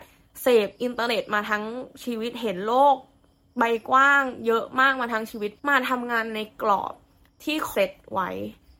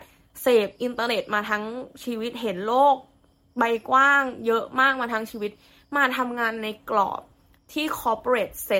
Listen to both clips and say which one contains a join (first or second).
first